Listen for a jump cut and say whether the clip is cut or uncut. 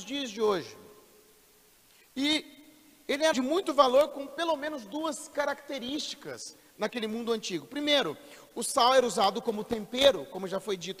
cut